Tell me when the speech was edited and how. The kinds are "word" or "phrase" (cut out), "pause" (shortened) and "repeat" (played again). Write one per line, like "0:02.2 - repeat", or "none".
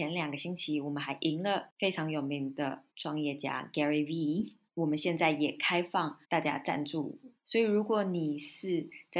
0:02.9 - pause
0:04.7 - pause
0:06.2 - pause
0:07.4 - pause

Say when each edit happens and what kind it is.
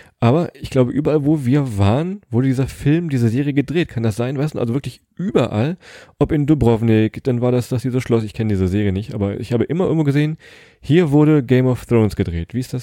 none

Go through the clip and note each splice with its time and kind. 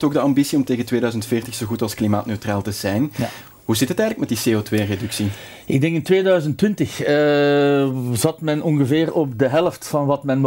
none

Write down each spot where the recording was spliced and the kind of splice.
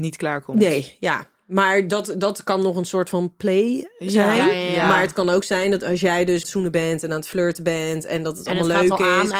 0:06.4 - phrase

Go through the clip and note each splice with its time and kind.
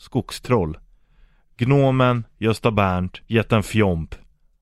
0:03.2 - pause

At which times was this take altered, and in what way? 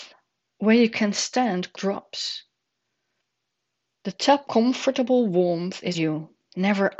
0:01.7 - word
0:04.4 - word
0:05.9 - word

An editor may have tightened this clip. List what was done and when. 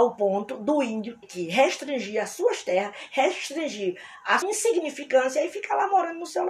0:01.2 - word
0:04.4 - word

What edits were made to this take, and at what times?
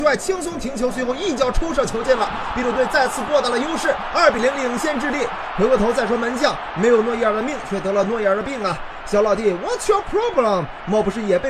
none

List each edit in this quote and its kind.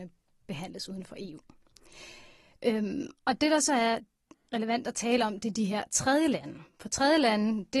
none

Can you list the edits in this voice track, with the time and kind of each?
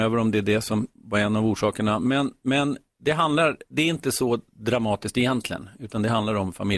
0:00.9 - pause

